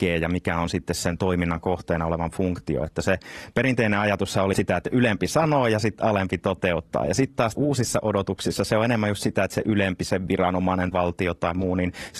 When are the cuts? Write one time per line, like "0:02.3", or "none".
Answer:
0:04.5
0:07.5
0:10.9

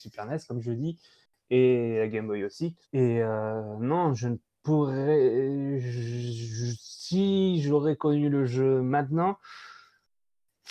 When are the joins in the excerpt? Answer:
0:02.8

